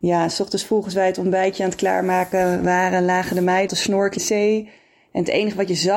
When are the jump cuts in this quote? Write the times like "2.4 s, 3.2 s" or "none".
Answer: 3.7 s, 4.2 s